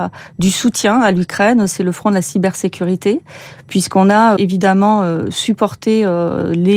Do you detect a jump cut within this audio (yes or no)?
yes